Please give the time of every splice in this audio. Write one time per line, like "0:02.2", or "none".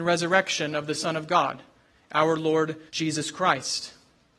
0:02.9